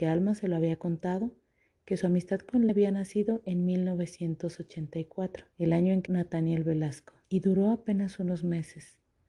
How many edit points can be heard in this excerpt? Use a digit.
4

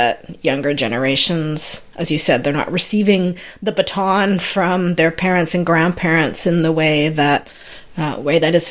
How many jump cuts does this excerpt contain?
1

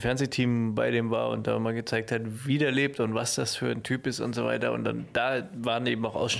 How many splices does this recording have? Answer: 0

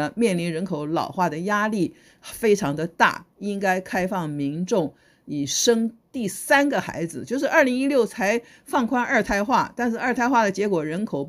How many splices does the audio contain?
0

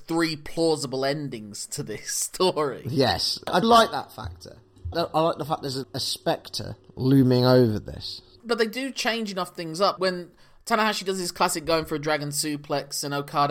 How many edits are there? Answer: 4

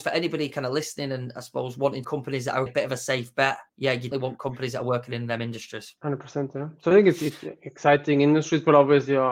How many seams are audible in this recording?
5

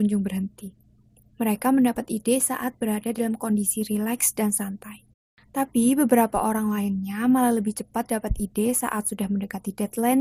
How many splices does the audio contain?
1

